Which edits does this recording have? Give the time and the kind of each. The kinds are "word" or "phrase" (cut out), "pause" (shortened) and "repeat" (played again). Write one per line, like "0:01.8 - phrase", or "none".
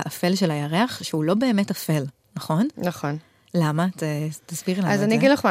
none